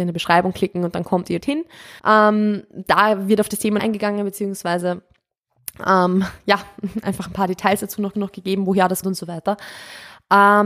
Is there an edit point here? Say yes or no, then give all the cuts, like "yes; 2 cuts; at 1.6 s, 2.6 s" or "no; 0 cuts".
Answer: yes; 5 cuts; at 1.4 s, 2.0 s, 3.8 s, 8.1 s, 9.0 s